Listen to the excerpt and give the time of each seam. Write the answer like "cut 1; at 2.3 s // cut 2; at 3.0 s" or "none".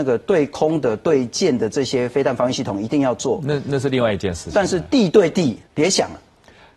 cut 1; at 5.7 s